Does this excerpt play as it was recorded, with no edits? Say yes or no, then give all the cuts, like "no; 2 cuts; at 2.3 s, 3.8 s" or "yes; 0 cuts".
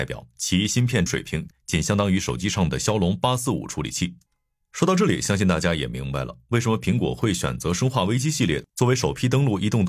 no; 1 cut; at 1.1 s